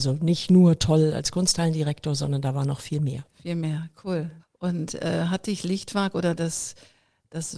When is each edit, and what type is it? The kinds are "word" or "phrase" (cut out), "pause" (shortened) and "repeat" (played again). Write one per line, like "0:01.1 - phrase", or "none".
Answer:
0:04.4 - pause